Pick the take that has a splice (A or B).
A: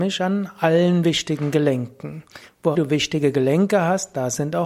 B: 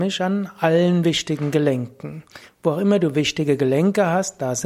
A